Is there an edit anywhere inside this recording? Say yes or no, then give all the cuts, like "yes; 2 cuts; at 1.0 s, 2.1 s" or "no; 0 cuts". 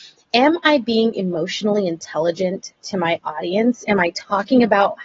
no; 0 cuts